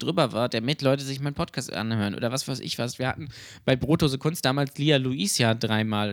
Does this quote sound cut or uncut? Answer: uncut